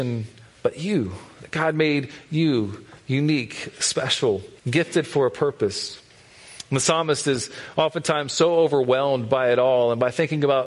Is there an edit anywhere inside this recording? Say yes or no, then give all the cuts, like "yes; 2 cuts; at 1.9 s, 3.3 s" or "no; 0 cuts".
yes; 1 cut; at 4.6 s